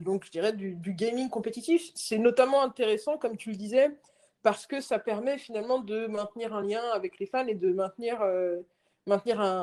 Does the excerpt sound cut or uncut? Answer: uncut